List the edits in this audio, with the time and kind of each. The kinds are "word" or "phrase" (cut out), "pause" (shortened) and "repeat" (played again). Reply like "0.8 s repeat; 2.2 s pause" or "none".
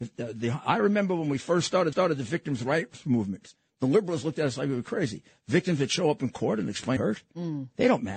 1.9 s repeat; 7.0 s phrase